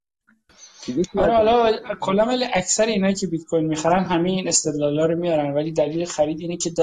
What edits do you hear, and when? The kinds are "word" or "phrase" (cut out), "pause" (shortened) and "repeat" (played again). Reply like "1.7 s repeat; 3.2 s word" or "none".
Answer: none